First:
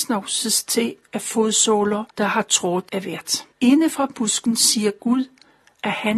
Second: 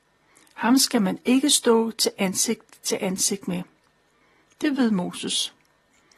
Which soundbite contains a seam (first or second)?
first